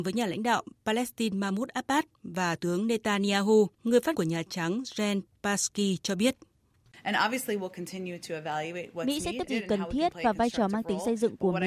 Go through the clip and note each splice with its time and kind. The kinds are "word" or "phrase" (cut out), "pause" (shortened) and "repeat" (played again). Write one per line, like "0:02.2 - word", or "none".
0:02.6 - word
0:03.7 - pause
0:04.1 - word
0:09.5 - phrase